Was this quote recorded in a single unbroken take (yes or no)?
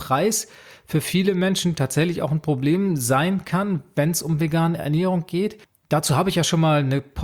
yes